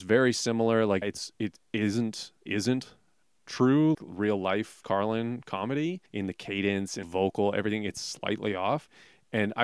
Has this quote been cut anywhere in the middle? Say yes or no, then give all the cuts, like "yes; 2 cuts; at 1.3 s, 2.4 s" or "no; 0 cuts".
yes; 6 cuts; at 1.0 s, 2.5 s, 3.9 s, 4.8 s, 6.1 s, 7.0 s